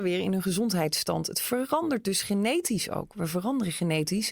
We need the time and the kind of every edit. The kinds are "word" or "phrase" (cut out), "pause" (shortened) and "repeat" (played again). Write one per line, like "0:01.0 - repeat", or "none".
none